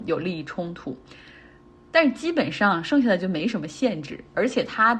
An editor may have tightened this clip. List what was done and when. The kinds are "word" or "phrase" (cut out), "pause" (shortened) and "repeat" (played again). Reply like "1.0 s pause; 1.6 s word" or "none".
none